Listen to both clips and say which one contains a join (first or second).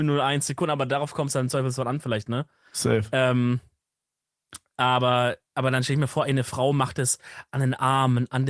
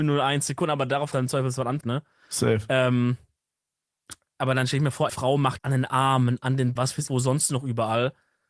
second